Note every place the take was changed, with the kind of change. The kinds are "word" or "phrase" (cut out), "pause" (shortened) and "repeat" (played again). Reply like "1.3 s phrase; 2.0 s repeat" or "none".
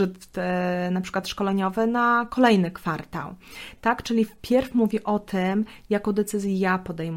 none